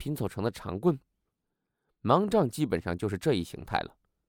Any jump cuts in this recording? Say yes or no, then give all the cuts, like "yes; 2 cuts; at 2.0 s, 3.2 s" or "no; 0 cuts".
no; 0 cuts